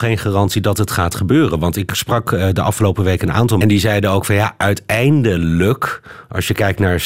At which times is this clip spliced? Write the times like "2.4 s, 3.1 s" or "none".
3.6 s